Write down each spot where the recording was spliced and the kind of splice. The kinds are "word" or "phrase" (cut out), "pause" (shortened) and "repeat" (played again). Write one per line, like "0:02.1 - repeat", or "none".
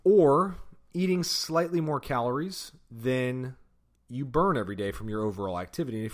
0:03.9 - pause